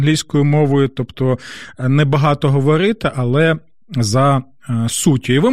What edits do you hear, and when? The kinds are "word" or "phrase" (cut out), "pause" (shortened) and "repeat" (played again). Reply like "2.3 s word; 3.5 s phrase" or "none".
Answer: none

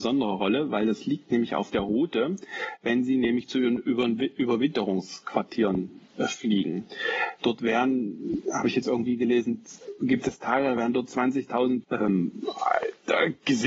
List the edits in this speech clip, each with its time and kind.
11.8 s word

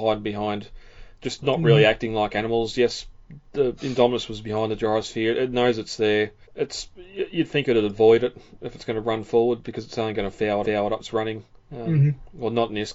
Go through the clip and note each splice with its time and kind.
6.4 s pause; 10.6 s repeat; 11.0 s word; 11.5 s pause

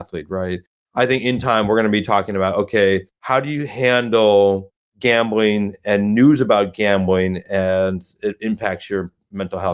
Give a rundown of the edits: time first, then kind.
3.1 s pause

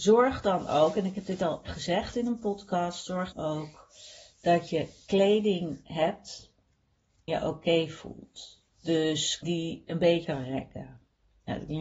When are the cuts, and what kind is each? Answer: 1.6 s word; 3.3 s word; 4.3 s pause; 7.3 s word; 9.4 s word; 10.2 s word

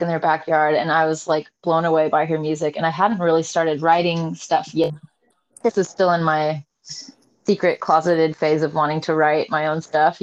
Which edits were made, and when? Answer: none

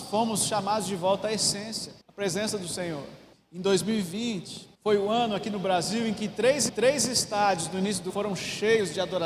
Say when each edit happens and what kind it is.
2.0 s pause; 3.3 s pause; 4.7 s pause; 6.7 s repeat; 8.1 s word

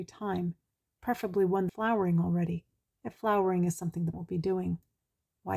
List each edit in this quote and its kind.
1.7 s word; 4.1 s word

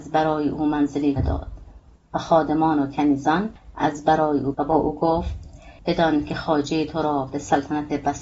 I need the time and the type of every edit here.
1.2 s word; 4.5 s word

